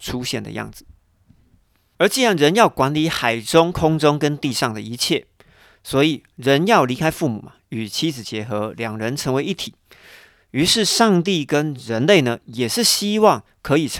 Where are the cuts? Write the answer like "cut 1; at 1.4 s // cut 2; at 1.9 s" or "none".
none